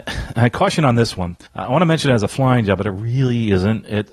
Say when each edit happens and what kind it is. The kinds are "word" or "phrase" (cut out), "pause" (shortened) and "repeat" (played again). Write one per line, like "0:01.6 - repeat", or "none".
0:01.5 - pause